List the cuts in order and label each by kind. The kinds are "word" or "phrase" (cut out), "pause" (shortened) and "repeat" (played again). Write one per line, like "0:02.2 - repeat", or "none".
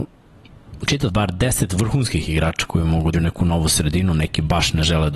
0:01.1 - phrase
0:03.1 - phrase